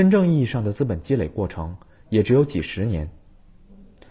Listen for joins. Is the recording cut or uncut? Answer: uncut